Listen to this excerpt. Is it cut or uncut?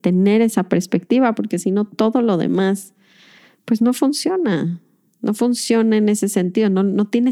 uncut